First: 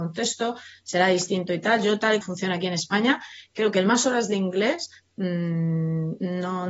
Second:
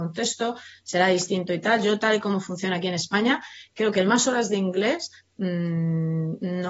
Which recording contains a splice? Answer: first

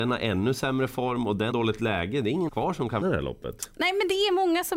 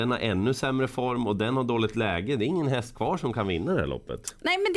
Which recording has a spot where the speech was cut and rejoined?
first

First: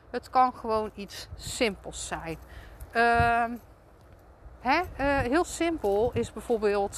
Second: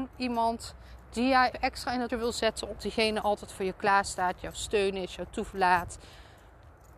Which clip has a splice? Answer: second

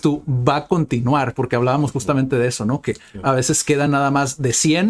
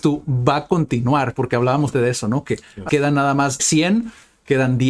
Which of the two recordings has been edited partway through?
second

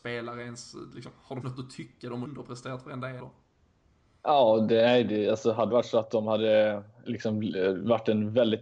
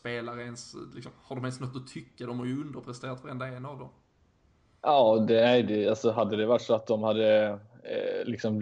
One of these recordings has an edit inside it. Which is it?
first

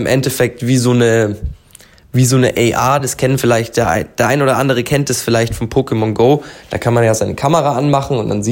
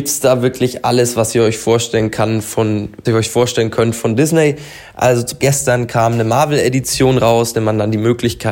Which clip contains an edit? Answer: second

